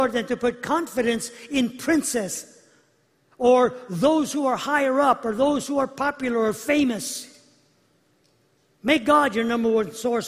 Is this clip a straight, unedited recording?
yes; 0 cuts

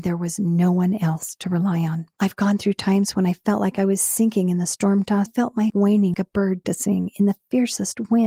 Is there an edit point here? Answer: yes; 5 cuts; at 2.1 s, 5.3 s, 5.7 s, 6.1 s, 6.6 s

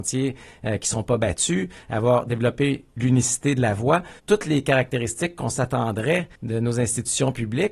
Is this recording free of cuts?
no; 2 cuts; at 4.2 s, 6.3 s

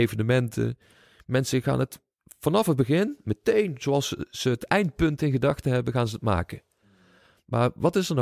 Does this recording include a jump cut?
no; 0 cuts

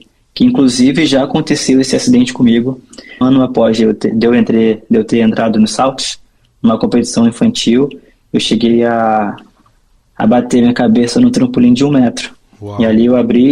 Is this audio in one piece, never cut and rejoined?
no; 1 cut; at 3.2 s

